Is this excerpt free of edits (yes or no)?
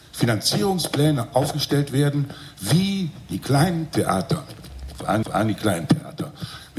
no